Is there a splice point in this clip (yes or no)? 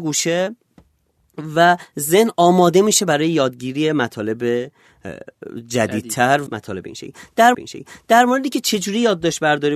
yes